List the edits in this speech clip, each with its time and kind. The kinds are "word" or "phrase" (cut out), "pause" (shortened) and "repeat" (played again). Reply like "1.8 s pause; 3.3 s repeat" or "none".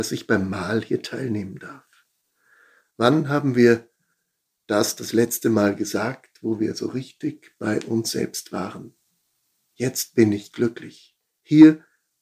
none

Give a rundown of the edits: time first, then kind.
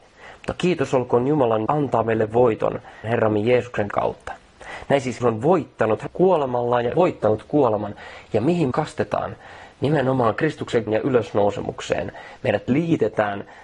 1.7 s word; 3.0 s word; 3.9 s word; 5.2 s word; 6.1 s word; 6.9 s word; 8.7 s word; 10.9 s word

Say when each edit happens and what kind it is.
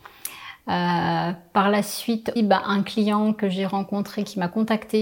2.4 s word

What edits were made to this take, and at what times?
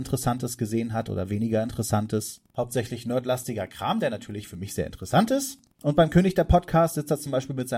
2.5 s pause; 5.7 s pause

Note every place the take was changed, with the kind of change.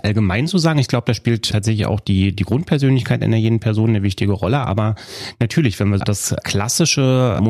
6.0 s word

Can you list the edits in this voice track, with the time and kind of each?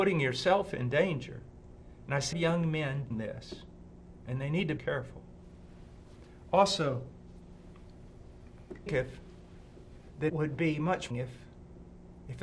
2.3 s phrase; 3.1 s word; 4.2 s pause; 4.8 s phrase; 8.9 s phrase; 10.3 s word; 11.1 s phrase

